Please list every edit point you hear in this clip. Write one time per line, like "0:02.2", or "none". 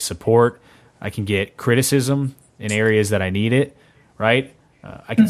none